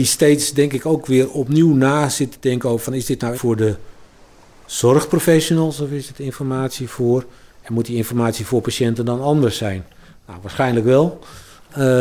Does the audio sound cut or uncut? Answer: cut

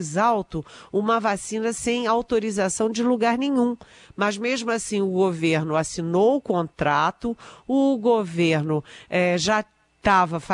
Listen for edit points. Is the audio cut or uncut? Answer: uncut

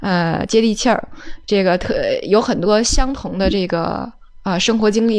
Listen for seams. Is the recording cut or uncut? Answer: uncut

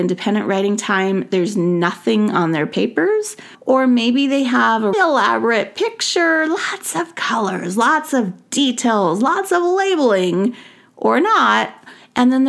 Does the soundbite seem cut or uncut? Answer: cut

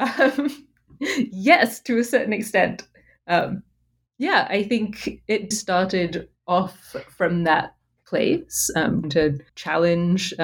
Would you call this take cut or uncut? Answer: cut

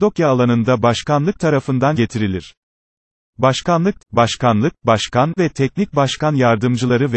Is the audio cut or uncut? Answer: cut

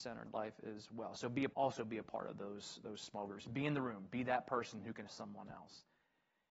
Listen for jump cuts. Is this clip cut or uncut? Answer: cut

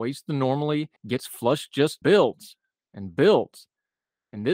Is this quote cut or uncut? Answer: cut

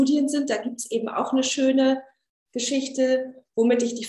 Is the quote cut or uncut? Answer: uncut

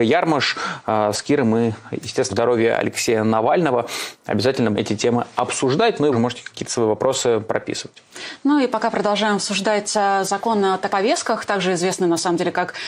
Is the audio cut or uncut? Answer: cut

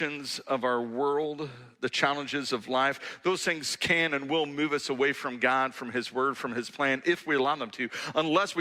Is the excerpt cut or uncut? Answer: uncut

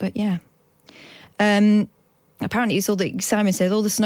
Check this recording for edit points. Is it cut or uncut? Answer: uncut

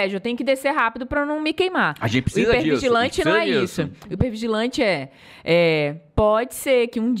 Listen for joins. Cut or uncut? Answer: uncut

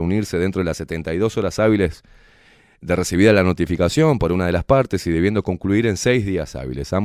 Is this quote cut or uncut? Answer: uncut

